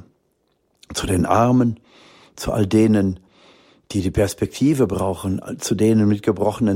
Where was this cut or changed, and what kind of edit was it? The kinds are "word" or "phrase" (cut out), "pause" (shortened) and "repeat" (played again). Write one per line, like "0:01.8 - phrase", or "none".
none